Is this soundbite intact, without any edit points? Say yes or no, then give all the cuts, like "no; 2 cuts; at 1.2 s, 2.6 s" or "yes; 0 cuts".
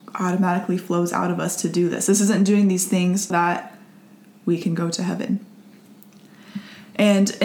no; 1 cut; at 3.3 s